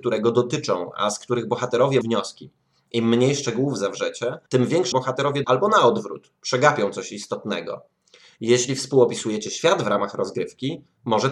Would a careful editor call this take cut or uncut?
cut